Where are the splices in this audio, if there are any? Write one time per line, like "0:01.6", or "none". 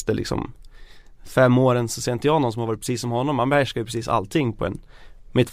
none